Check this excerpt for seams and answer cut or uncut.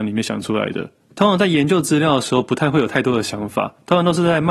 uncut